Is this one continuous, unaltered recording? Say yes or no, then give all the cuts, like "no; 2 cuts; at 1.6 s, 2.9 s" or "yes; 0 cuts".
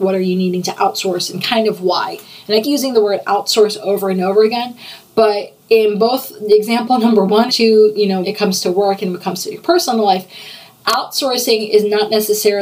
no; 4 cuts; at 2.6 s, 5.6 s, 7.5 s, 8.2 s